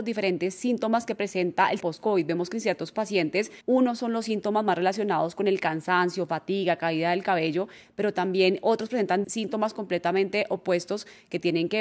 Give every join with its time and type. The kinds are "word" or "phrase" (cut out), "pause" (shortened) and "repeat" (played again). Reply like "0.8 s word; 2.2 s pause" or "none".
1.8 s word; 3.6 s pause; 9.2 s word